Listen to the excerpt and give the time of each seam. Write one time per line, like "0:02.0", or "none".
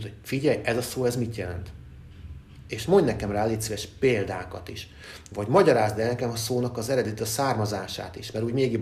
none